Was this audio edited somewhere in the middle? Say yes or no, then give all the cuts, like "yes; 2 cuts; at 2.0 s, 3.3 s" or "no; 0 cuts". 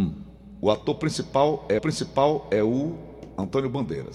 yes; 1 cut; at 1.8 s